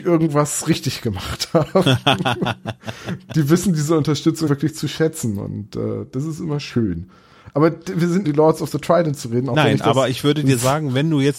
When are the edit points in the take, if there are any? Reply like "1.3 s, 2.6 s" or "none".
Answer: 4.5 s, 8.2 s